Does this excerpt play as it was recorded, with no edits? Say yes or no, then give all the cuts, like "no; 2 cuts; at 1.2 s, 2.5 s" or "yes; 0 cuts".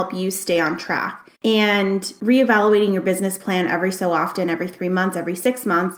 no; 1 cut; at 1.3 s